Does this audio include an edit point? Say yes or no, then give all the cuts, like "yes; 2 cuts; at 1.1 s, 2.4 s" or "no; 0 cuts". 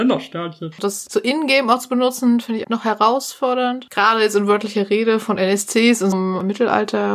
yes; 2 cuts; at 2.6 s, 6.1 s